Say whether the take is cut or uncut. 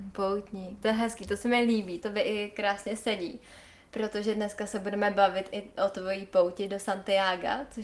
cut